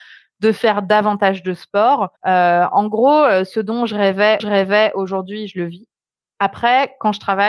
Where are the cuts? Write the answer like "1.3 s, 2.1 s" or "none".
2.2 s, 4.4 s